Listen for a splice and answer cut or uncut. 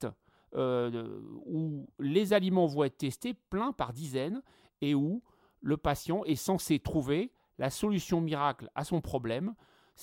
uncut